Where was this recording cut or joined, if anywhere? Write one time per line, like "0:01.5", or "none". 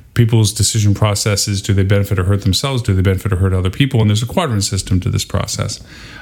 none